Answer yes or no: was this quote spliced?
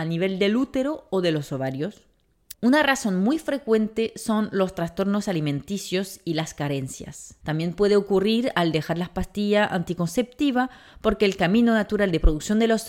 yes